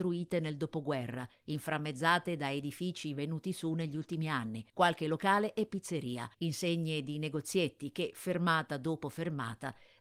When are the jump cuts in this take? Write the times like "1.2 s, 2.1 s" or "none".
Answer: 4.7 s, 6.3 s